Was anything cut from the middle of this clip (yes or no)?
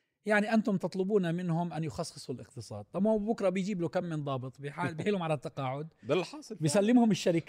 no